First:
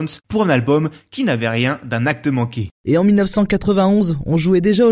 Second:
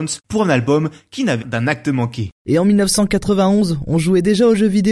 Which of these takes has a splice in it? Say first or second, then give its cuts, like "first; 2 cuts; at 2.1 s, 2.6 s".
second; 1 cut; at 1.4 s